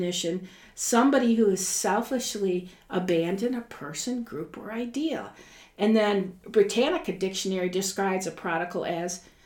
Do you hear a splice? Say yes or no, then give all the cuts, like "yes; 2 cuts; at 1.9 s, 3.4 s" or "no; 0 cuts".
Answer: no; 0 cuts